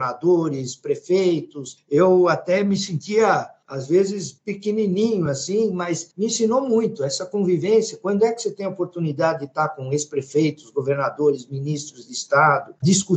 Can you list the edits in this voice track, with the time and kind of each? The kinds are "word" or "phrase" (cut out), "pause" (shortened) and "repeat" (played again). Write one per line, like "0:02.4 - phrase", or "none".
none